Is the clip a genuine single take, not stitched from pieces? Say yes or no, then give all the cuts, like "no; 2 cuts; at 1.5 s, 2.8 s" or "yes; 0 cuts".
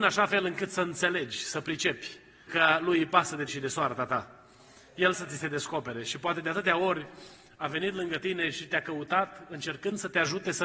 no; 3 cuts; at 2.5 s, 3.5 s, 5.1 s